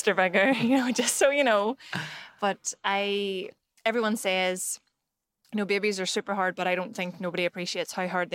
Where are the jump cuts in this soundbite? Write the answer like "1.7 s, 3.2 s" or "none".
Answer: none